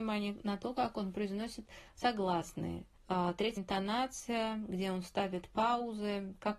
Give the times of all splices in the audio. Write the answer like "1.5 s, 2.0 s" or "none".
3.6 s